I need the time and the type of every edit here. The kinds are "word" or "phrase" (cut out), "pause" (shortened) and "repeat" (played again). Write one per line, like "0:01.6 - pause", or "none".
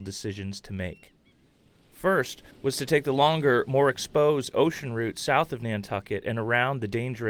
0:02.5 - pause